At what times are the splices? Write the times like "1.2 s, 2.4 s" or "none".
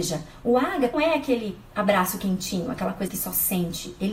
0.9 s, 3.1 s